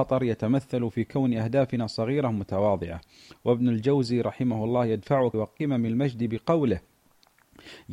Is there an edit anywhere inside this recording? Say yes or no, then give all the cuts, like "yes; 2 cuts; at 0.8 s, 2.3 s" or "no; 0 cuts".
yes; 1 cut; at 5.3 s